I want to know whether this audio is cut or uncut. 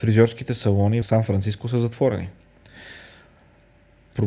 cut